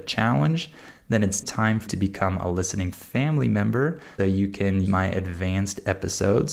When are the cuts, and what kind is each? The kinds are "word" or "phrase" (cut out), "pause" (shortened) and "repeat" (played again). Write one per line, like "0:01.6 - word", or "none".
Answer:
0:01.4 - word
0:01.9 - word
0:02.9 - word
0:04.2 - word
0:04.9 - word